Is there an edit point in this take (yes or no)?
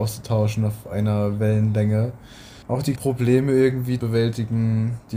yes